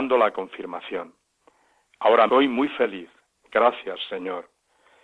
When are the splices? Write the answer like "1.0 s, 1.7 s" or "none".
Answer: 2.3 s